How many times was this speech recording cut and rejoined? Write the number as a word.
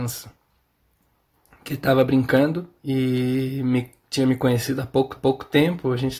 two